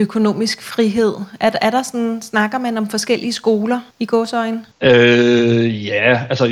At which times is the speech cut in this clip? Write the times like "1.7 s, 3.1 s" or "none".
3.9 s, 4.7 s